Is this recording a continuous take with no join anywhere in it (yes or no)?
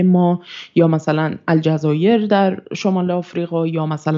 yes